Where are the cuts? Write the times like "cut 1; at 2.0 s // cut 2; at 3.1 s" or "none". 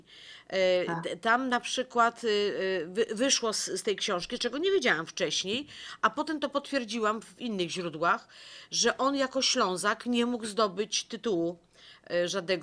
none